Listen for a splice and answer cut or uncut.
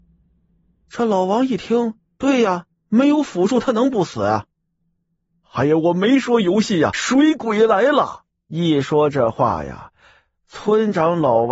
cut